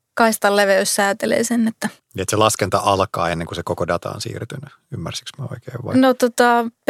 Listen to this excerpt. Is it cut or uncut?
cut